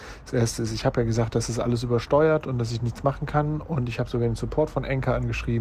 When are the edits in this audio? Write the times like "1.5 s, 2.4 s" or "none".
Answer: none